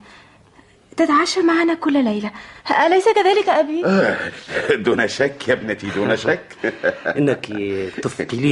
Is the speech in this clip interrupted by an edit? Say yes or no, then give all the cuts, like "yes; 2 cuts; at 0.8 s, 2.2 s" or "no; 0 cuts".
no; 0 cuts